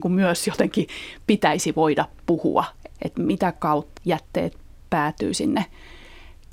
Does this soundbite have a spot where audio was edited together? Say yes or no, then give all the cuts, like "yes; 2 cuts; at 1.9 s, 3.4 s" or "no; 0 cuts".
yes; 3 cuts; at 3.0 s, 3.6 s, 4.0 s